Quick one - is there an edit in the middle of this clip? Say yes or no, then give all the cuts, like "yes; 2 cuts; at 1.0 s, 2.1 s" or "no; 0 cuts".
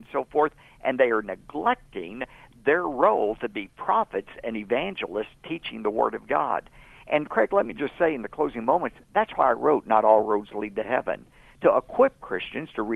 no; 0 cuts